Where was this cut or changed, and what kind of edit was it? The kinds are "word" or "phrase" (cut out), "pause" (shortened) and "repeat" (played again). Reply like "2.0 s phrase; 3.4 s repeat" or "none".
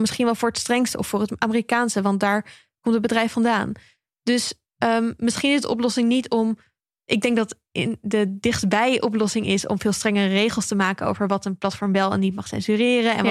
none